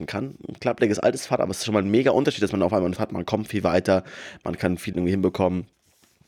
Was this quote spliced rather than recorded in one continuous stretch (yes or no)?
yes